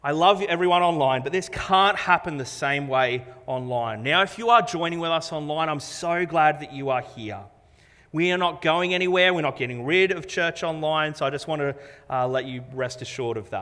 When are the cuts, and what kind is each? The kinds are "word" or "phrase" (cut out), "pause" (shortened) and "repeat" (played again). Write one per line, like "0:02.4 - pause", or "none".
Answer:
none